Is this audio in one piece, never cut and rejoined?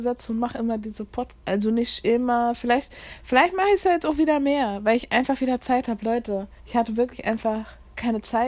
no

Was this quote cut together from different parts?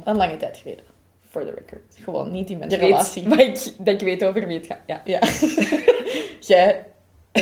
yes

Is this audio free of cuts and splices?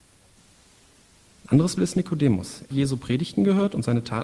no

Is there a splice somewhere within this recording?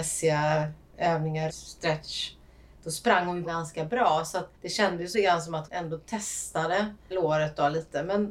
yes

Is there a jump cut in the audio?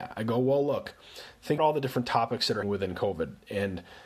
yes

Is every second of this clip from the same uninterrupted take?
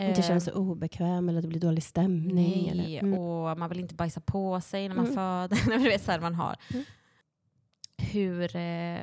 yes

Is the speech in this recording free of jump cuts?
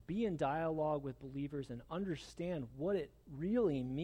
yes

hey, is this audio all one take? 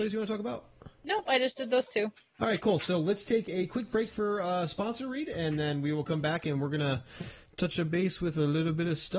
yes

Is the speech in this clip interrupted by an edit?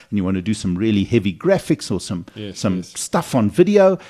no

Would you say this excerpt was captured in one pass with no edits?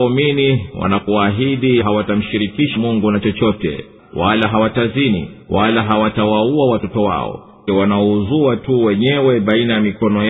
no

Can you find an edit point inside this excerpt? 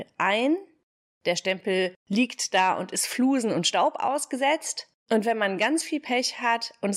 yes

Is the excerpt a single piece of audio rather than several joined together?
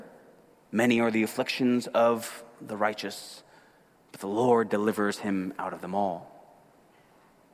yes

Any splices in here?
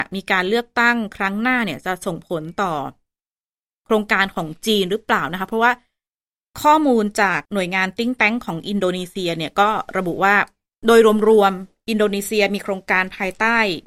yes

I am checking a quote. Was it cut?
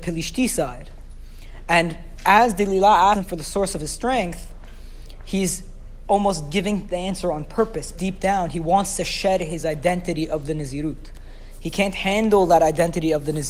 yes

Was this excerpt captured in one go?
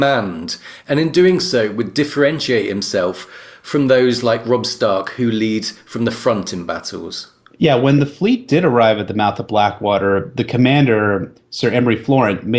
yes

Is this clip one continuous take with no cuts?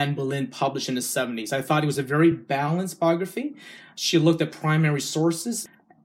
yes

